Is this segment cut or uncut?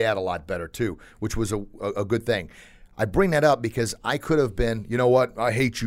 uncut